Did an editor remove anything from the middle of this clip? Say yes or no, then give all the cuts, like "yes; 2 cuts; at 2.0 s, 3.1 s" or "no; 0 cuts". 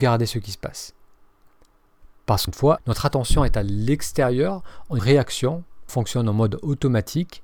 yes; 4 cuts; at 2.5 s, 2.8 s, 5.0 s, 5.9 s